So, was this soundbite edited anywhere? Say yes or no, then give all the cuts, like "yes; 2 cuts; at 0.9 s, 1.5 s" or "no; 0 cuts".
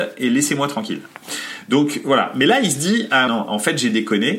yes; 1 cut; at 3.3 s